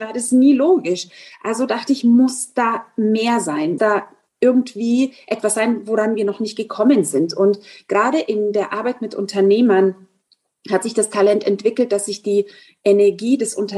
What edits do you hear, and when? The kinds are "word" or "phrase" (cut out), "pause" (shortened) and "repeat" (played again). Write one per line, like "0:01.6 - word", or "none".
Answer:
0:03.8 - word

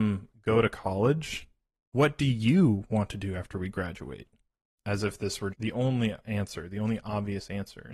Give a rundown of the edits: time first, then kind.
0:05.5 - word

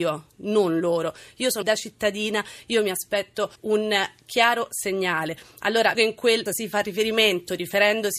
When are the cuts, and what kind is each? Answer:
0:01.6 - phrase
0:03.6 - pause
0:05.9 - word
0:06.5 - word

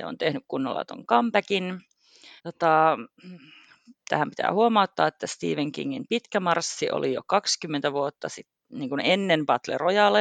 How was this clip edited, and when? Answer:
0:02.4 - pause

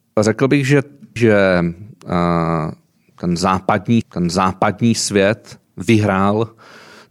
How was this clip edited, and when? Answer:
0:01.2 - phrase
0:04.0 - repeat

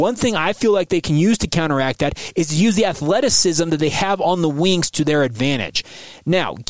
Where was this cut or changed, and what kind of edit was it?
none

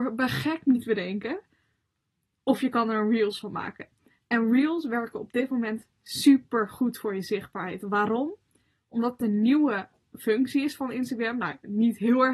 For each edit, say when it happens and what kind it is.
none

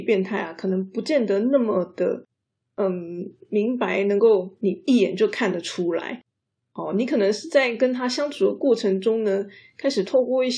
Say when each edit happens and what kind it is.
none

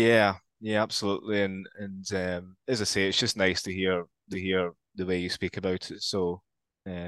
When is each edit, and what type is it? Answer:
0:04.3 - repeat

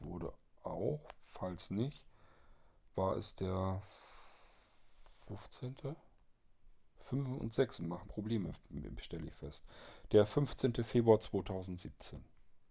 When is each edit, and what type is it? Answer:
0:08.0 - word

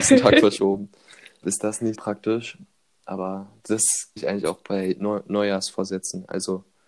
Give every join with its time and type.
0:01.4 - word
0:01.9 - word
0:04.2 - phrase

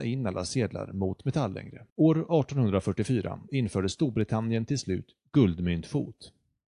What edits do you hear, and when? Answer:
0:01.9 - pause

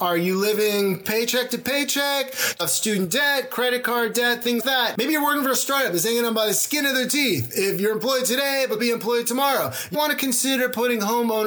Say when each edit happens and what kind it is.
0:02.6 - word
0:04.6 - word
0:08.8 - word
0:09.9 - word

